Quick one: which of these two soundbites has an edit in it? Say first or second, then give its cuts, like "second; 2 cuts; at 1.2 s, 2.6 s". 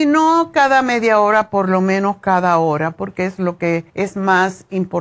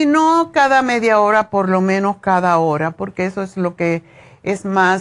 first; 2 cuts; at 3.4 s, 3.9 s